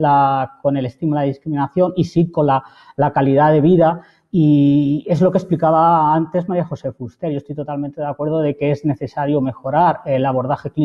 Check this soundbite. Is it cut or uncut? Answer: uncut